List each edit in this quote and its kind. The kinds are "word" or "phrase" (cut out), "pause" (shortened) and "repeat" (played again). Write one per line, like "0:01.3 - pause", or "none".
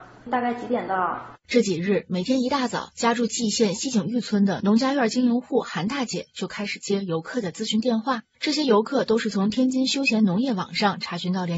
0:02.9 - pause